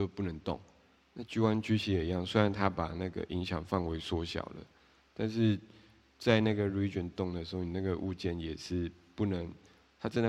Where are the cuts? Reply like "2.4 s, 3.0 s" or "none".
none